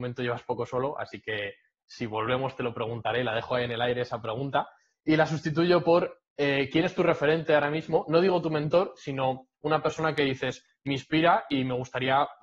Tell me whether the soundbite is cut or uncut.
uncut